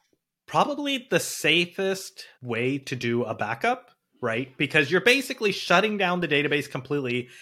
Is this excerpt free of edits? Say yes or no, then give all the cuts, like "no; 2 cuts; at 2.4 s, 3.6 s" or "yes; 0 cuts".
no; 1 cut; at 2.3 s